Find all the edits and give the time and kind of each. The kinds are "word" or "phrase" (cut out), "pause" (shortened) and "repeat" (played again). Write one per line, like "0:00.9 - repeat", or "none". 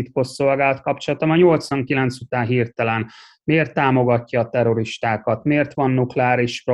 none